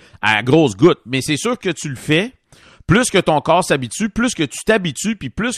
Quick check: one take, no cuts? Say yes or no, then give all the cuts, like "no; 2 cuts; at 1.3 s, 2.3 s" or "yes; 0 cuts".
no; 1 cut; at 1.6 s